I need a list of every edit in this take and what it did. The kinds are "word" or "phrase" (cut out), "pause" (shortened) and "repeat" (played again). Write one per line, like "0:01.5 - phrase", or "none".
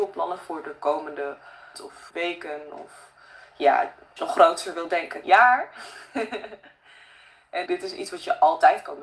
0:01.7 - word
0:02.1 - word
0:04.2 - word
0:05.2 - word
0:07.7 - word